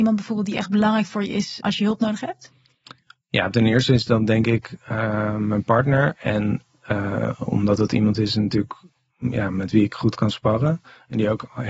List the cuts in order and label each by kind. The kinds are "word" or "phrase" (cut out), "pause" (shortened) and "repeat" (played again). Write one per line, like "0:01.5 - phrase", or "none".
0:01.6 - word